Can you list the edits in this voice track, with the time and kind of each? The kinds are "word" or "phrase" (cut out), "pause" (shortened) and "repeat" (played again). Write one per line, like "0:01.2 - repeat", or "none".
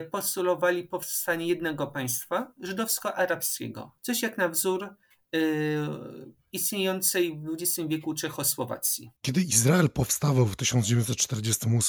0:04.0 - pause
0:09.2 - pause

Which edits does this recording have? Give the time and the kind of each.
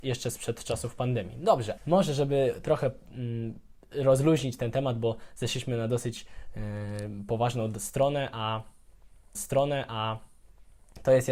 0:01.8 - word
0:09.3 - repeat

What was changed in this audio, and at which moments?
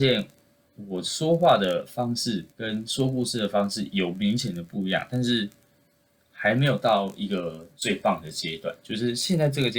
0:02.5 - pause

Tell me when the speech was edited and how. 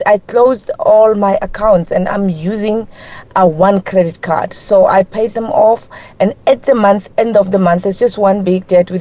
none

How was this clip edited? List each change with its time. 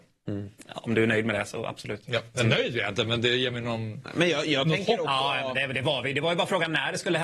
none

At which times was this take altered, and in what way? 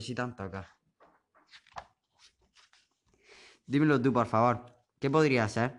none

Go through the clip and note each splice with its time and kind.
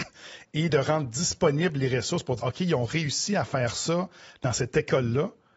0:02.4 - word

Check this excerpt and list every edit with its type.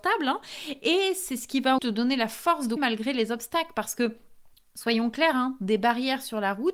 0:01.8 - word
0:02.8 - word
0:04.5 - pause

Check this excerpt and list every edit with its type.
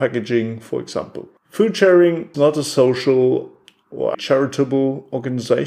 0:01.4 - pause
0:02.3 - word
0:04.1 - word

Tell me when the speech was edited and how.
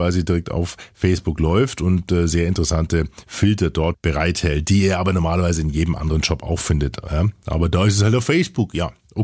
0:03.9 - word

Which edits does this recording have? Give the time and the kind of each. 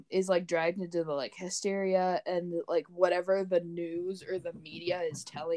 none

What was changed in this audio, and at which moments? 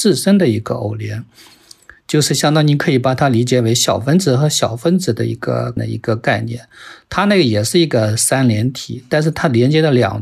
0:05.8 - word

